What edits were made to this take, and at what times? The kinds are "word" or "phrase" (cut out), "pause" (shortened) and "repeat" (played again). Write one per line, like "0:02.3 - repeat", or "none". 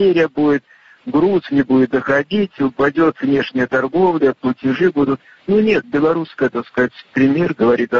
0:05.8 - word